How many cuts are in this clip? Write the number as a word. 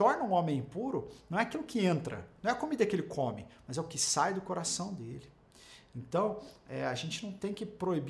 zero